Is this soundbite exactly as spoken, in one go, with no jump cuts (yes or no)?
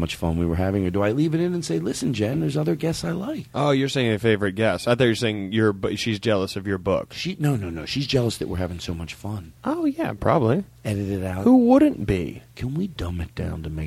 no